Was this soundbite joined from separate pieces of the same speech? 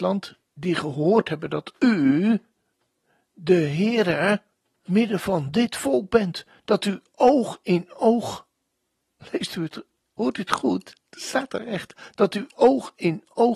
yes; 1 cut; at 4.9 s

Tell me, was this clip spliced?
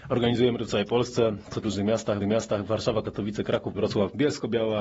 yes; 3 cuts; at 1.6 s, 2.2 s, 3.7 s

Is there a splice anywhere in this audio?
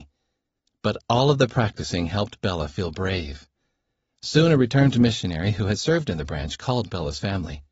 no; 0 cuts

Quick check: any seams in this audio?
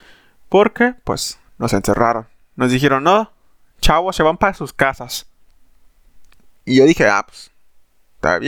no; 0 cuts

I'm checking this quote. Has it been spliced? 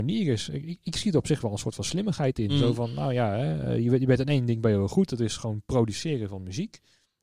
no; 0 cuts

